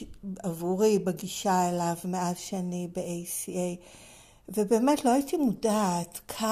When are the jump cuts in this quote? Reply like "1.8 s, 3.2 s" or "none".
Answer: none